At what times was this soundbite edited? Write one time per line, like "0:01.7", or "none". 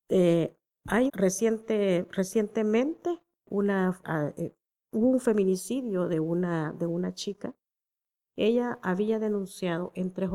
0:01.1
0:04.0

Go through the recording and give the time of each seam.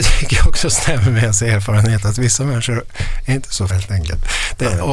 0:03.7

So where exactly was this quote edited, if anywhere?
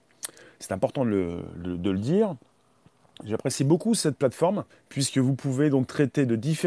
0:04.7

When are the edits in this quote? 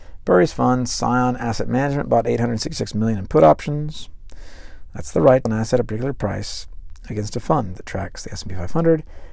0:05.5

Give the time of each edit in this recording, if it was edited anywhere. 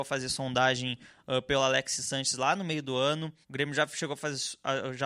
0:03.4

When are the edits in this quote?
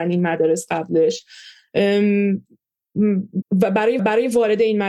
0:03.4
0:04.0

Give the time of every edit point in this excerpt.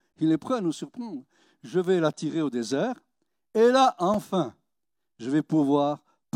none

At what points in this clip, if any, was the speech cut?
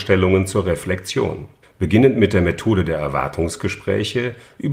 0:01.6

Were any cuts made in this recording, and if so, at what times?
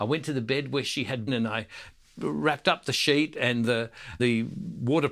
0:01.3
0:04.2

